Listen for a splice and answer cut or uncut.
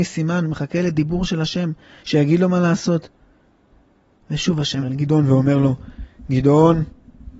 cut